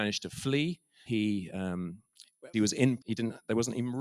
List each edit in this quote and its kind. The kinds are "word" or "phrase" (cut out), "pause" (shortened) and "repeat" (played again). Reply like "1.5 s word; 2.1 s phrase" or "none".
1.1 s word; 2.5 s word; 3.0 s word